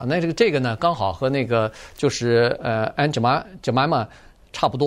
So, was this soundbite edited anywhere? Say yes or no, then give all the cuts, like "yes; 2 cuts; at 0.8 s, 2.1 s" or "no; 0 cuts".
no; 0 cuts